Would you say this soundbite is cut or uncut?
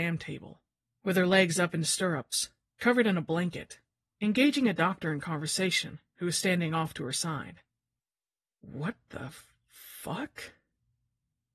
uncut